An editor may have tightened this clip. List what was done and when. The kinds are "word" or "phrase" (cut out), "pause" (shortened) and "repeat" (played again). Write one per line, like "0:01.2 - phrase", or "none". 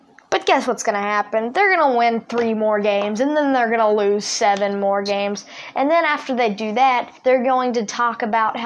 0:07.2 - pause